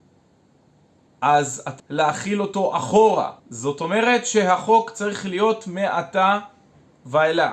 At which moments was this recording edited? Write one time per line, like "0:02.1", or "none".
0:01.8
0:03.4